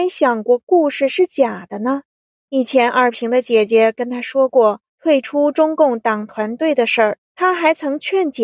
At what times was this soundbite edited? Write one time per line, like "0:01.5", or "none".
0:02.2
0:04.9
0:07.2